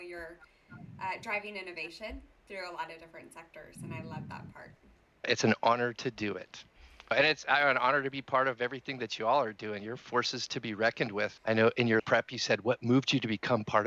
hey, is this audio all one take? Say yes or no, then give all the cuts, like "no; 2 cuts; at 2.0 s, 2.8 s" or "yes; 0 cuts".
yes; 0 cuts